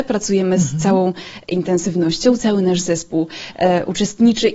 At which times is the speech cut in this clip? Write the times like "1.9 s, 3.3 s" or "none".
none